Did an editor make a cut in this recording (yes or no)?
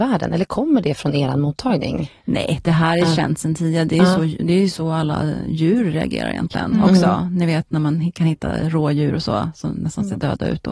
no